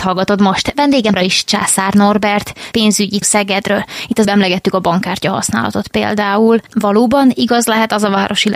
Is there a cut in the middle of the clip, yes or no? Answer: yes